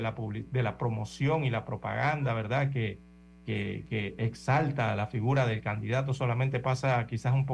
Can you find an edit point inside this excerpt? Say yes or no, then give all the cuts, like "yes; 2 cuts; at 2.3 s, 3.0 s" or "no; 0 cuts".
no; 0 cuts